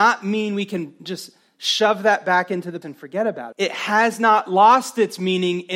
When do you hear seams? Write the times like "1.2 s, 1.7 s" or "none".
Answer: 2.8 s, 3.5 s

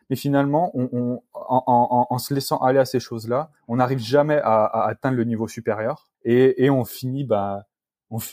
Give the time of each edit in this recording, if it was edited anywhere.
6.1 s

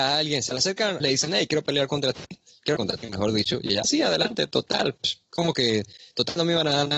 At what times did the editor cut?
1.0 s, 2.8 s, 3.8 s

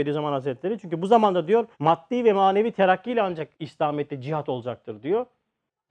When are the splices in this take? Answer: 1.7 s, 3.5 s

